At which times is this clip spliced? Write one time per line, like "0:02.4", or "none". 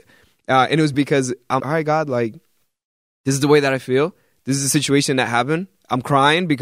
0:00.9
0:01.6